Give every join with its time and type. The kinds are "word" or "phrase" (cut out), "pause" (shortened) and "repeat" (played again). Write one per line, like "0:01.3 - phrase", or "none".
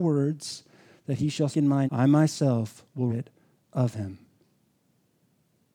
0:01.5 - word
0:01.9 - word
0:03.1 - word